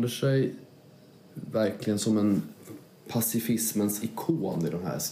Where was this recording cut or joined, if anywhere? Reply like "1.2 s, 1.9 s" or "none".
none